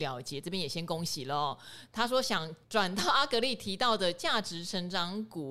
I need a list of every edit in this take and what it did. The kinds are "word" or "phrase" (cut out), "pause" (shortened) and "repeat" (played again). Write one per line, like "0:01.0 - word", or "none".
0:02.6 - pause